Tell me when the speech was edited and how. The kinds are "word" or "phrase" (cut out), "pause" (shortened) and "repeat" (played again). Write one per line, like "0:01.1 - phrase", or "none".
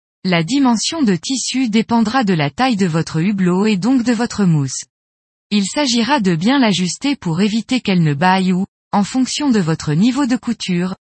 none